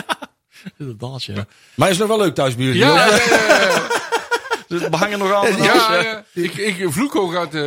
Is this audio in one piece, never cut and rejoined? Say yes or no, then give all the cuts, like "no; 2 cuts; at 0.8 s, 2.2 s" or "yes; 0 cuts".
yes; 0 cuts